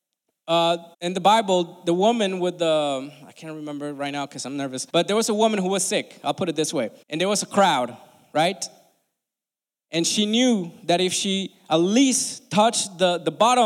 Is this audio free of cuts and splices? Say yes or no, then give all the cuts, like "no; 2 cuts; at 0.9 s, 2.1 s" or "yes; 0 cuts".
no; 3 cuts; at 0.9 s, 4.9 s, 7.0 s